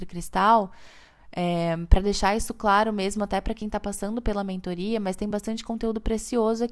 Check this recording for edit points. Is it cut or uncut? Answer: uncut